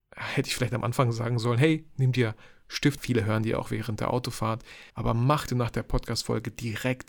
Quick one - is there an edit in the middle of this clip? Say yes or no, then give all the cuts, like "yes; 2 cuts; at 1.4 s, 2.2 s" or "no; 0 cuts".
yes; 3 cuts; at 3.0 s, 4.9 s, 5.5 s